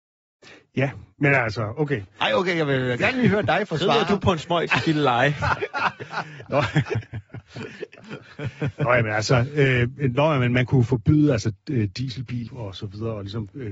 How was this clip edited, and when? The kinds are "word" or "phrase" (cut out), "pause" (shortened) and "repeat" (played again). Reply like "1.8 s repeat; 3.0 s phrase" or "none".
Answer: 12.5 s word